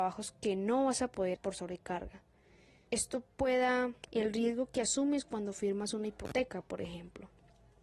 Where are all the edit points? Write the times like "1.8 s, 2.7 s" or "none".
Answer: 1.3 s, 4.0 s